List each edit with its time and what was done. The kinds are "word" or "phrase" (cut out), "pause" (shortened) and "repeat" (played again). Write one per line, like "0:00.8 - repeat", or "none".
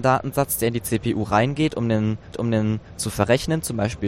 0:02.3 - repeat